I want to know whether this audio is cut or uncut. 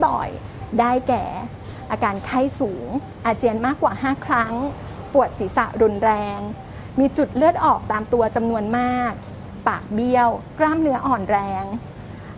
uncut